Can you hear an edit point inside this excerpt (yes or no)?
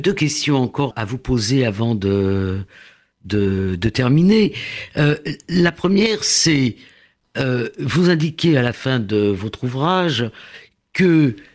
yes